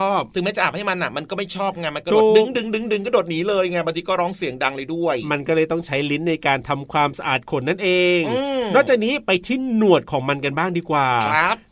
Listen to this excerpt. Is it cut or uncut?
uncut